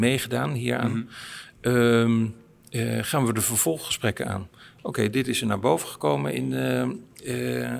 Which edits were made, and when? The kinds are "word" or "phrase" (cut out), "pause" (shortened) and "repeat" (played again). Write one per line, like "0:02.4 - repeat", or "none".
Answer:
none

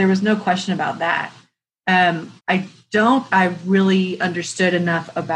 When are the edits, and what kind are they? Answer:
0:02.4 - pause
0:03.3 - word

